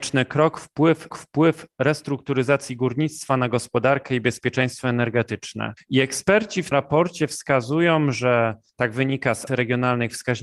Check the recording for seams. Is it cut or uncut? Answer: cut